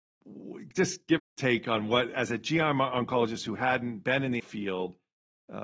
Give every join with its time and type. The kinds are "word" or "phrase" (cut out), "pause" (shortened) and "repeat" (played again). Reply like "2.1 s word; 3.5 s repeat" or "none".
1.2 s phrase; 2.1 s word; 4.4 s word